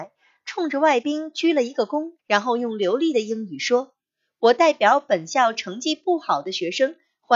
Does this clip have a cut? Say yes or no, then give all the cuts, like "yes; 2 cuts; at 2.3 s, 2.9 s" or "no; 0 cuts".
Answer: yes; 1 cut; at 2.2 s